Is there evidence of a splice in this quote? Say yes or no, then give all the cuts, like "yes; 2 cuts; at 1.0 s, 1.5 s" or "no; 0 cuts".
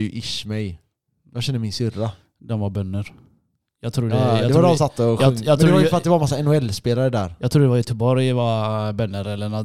yes; 1 cut; at 4.8 s